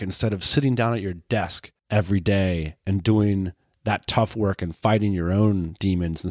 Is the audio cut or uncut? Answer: cut